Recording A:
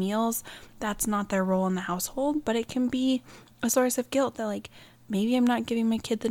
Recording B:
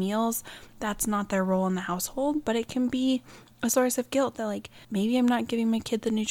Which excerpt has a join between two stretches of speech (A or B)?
B